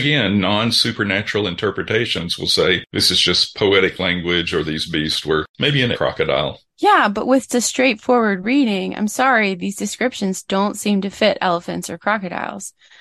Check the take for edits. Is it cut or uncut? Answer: cut